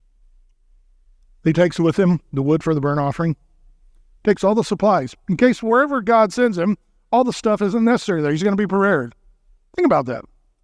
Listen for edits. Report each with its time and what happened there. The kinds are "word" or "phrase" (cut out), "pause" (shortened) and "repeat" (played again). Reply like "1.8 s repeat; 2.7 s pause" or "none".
none